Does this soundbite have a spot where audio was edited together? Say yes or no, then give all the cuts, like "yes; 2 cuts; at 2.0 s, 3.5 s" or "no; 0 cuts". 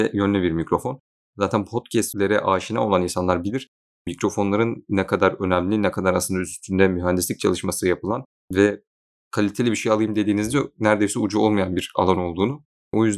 no; 0 cuts